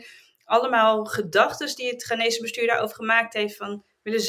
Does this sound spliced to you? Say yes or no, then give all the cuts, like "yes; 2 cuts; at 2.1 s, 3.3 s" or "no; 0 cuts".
no; 0 cuts